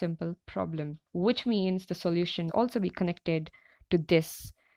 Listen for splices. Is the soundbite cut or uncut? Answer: cut